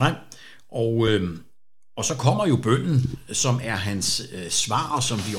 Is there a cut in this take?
no; 0 cuts

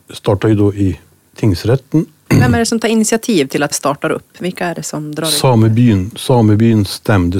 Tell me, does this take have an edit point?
yes; 1 cut; at 3.7 s

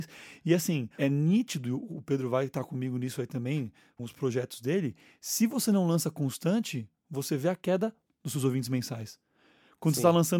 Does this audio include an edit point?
yes; 3 cuts; at 1.0 s, 4.0 s, 8.1 s

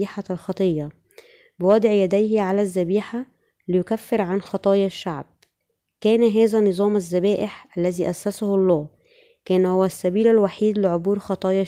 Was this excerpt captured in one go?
yes; 0 cuts

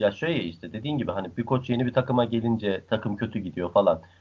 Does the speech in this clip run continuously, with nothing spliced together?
yes; 0 cuts

